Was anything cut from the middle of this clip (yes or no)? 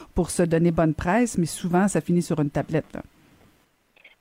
no